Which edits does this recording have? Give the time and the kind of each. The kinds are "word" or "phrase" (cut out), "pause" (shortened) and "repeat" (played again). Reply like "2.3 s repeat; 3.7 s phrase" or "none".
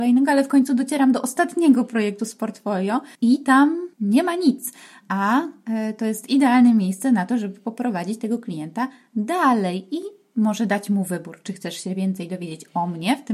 3.1 s pause; 3.9 s pause